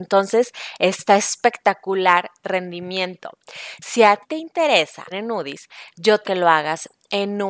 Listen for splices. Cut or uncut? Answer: cut